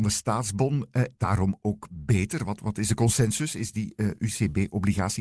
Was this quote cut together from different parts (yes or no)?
yes